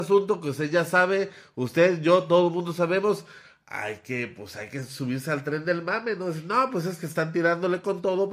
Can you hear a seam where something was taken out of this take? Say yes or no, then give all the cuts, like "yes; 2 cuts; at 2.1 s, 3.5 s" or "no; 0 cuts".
no; 0 cuts